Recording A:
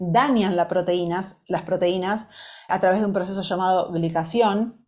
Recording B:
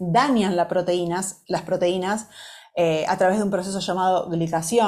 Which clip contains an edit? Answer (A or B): A